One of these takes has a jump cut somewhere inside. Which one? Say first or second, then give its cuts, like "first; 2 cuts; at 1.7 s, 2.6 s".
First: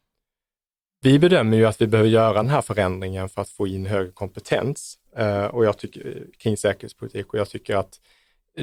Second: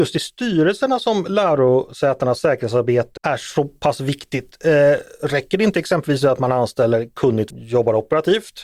second; 2 cuts; at 3.2 s, 7.5 s